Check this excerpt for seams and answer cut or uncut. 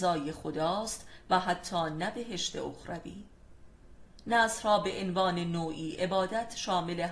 uncut